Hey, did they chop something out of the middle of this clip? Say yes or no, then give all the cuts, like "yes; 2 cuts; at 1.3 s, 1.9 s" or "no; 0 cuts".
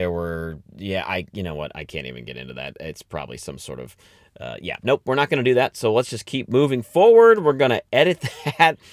no; 0 cuts